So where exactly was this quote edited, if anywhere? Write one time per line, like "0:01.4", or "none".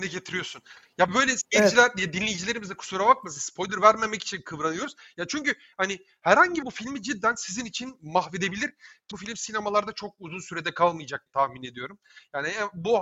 0:01.1
0:06.6
0:09.1
0:11.3

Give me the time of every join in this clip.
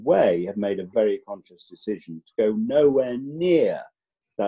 0:00.9

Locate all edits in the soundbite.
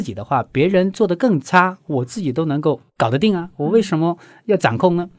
none

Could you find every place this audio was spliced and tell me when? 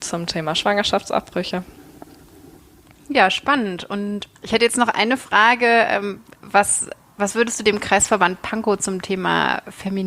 0:04.4

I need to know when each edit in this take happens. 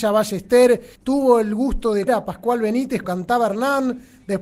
0:01.0
0:02.1
0:03.0

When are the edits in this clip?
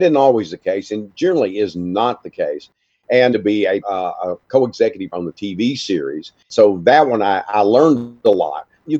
0:03.3
0:03.8
0:05.1

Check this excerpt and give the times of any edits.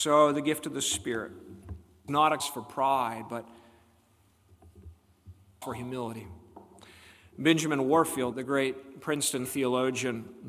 0:02.1
0:02.4
0:05.6
0:08.3
0:09.4

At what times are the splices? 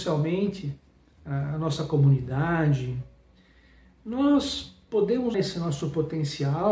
0:05.3

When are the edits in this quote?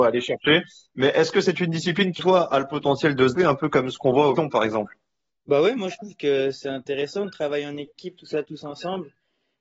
0:02.2
0:03.3
0:04.4

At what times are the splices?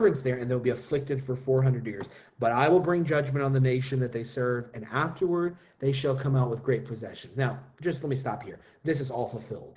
none

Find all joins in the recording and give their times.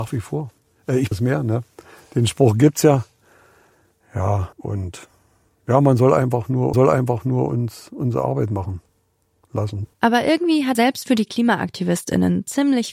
0:01.1
0:04.5
0:06.7
0:09.9
0:10.7

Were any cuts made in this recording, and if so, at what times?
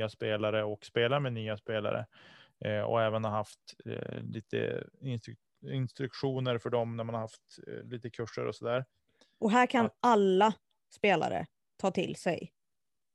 none

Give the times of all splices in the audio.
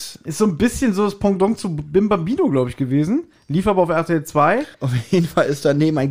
0:04.7

